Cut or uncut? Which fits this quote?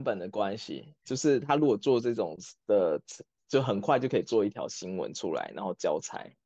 uncut